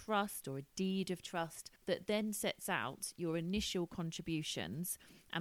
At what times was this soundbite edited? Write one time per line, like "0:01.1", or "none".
0:01.8